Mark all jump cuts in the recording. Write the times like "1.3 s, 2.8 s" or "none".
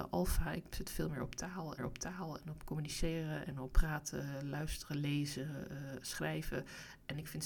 1.8 s, 3.7 s